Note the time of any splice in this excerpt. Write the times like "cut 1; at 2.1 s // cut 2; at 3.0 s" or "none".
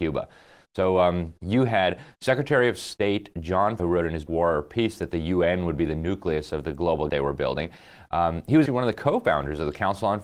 cut 1; at 1.4 s // cut 2; at 3.8 s // cut 3; at 4.3 s // cut 4; at 7.1 s // cut 5; at 8.7 s